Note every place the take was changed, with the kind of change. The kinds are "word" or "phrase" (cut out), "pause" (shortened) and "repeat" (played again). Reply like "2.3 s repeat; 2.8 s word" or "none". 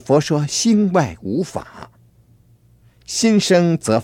none